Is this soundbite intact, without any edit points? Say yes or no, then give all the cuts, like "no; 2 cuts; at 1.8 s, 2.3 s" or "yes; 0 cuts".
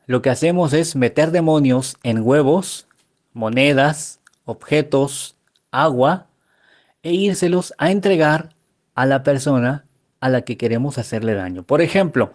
yes; 0 cuts